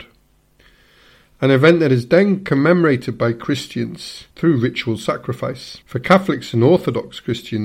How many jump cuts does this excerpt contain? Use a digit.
2